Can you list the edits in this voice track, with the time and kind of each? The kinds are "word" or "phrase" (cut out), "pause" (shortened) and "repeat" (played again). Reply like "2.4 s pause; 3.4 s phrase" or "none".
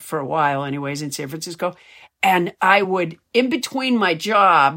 none

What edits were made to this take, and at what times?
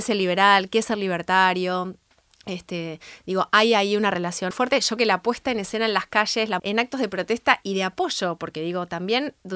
4.5 s word; 5.0 s word; 6.6 s word

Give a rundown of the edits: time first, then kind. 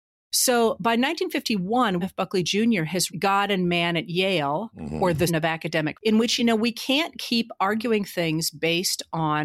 2.0 s word; 3.1 s word; 5.3 s word; 5.9 s word; 6.4 s word

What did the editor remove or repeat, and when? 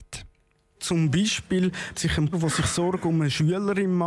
1.9 s word; 2.3 s word

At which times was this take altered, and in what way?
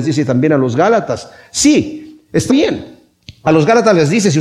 2.5 s word

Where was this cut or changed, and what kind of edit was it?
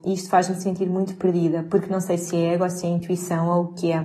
none

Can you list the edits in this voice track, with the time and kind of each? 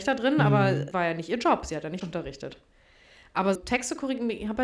0.9 s word; 2.0 s word; 3.5 s word

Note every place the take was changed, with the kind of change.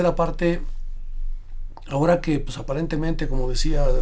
none

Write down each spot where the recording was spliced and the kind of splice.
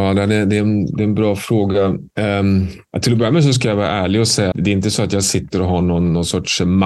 2.1 s pause; 2.9 s pause; 4.5 s word

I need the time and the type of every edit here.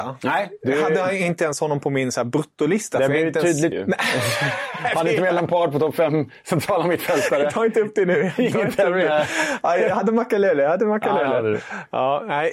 3.7 s phrase

